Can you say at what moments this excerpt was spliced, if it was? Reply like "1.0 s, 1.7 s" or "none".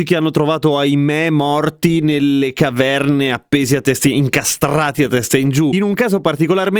none

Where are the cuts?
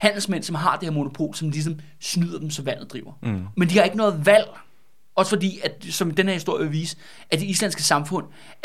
none

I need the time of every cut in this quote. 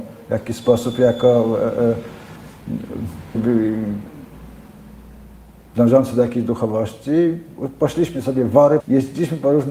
3.3 s, 8.8 s

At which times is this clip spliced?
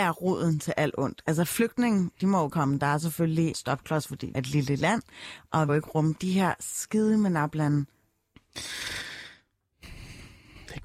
2.5 s, 3.5 s, 4.3 s, 5.7 s, 6.1 s

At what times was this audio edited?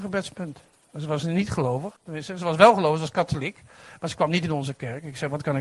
2.0 s

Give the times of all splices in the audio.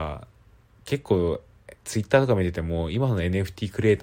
1.8 s

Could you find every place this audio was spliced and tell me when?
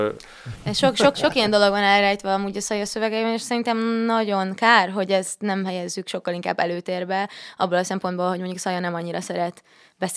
1.1 s

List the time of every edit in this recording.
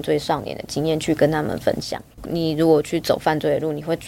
2.1 s

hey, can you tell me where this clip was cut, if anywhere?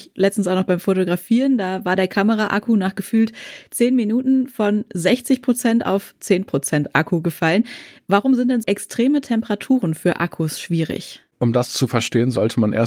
8.6 s, 11.3 s

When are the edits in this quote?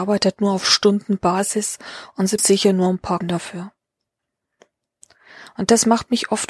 2.4 s, 3.2 s

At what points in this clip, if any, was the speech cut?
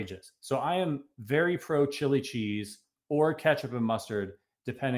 none

